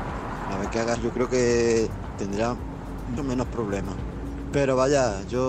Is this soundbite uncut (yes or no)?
no